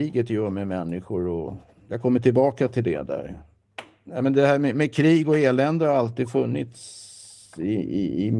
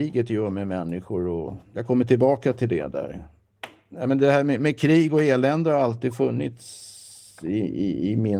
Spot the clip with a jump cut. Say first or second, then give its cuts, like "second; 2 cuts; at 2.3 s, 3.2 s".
second; 1 cut; at 1.6 s